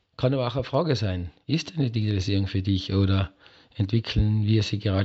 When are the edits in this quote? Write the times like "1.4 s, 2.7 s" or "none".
none